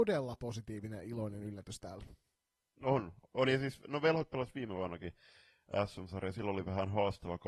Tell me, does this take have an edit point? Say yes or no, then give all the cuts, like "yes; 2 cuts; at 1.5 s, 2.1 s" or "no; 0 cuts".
no; 0 cuts